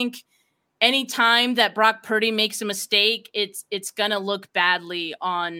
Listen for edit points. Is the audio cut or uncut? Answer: uncut